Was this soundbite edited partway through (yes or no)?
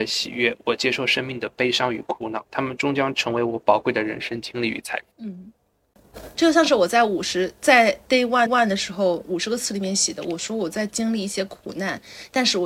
yes